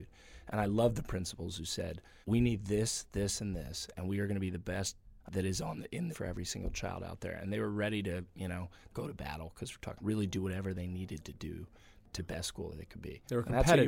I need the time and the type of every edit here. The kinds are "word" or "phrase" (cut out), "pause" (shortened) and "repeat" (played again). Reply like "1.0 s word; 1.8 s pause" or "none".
2.2 s pause; 5.2 s phrase; 6.1 s phrase; 8.9 s word; 10.0 s phrase; 12.2 s word